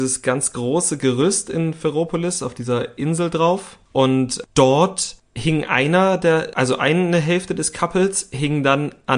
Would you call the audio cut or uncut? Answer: uncut